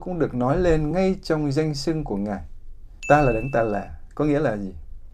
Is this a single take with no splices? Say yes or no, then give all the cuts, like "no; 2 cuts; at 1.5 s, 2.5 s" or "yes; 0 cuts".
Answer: yes; 0 cuts